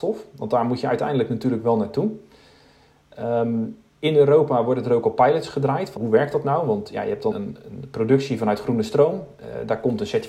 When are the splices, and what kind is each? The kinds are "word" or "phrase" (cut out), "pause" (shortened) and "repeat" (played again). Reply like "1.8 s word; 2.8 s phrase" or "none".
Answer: 3.9 s pause; 6.0 s word; 7.3 s word